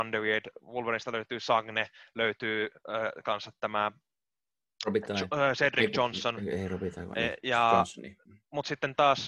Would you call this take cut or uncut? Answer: uncut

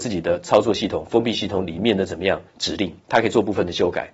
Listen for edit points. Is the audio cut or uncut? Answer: cut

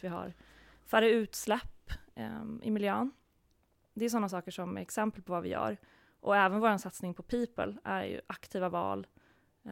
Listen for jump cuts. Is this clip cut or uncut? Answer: uncut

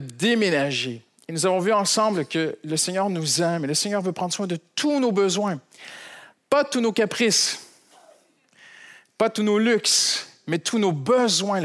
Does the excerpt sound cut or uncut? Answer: uncut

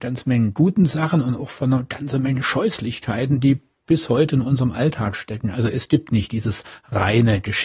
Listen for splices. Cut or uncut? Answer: uncut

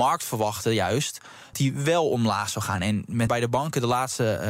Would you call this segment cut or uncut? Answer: cut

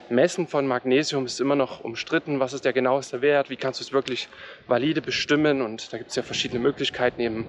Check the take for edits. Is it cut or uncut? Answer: uncut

